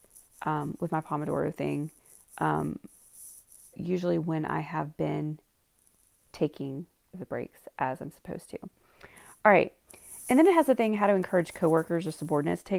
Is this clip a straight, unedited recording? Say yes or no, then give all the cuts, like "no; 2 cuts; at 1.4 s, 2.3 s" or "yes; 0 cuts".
no; 2 cuts; at 3.7 s, 7.1 s